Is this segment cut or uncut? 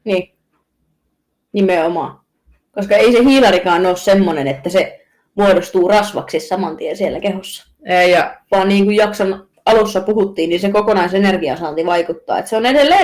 uncut